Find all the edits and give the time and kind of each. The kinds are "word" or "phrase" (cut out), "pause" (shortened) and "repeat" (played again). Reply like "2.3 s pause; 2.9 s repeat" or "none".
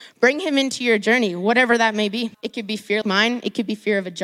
2.3 s pause; 3.0 s word